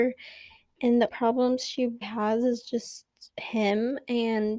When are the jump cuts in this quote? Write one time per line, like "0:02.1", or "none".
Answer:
0:01.1
0:02.0
0:03.3